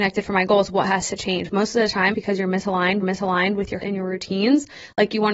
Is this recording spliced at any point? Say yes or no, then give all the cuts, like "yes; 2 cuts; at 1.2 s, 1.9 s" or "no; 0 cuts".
yes; 3 cuts; at 2.1 s, 3.0 s, 3.8 s